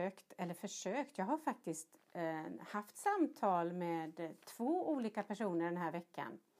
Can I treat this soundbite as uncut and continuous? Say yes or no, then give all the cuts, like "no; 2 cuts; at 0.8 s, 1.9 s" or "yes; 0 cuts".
yes; 0 cuts